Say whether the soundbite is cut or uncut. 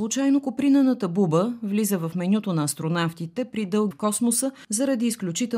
cut